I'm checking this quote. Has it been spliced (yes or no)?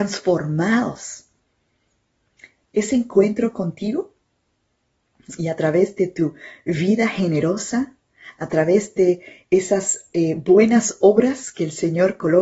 no